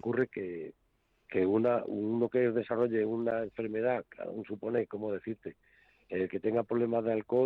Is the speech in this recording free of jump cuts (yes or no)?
yes